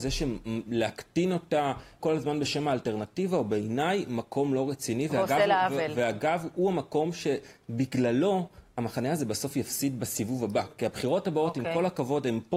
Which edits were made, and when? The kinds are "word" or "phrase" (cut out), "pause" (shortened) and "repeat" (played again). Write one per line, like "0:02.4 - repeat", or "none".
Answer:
0:02.0 - word